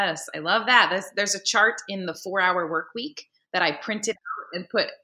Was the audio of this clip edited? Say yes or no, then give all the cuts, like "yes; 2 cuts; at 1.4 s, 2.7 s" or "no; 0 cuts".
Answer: no; 0 cuts